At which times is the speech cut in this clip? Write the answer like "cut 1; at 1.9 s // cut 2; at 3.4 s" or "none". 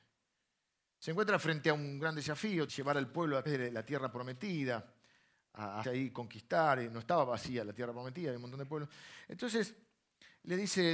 cut 1; at 2.7 s // cut 2; at 3.5 s // cut 3; at 5.8 s